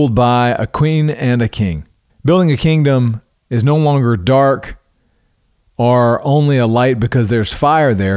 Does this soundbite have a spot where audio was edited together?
yes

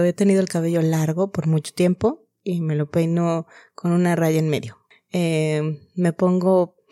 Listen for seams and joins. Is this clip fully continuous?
yes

